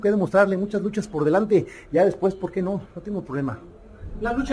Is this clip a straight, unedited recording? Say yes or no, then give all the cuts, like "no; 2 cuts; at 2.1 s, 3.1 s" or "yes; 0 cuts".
yes; 0 cuts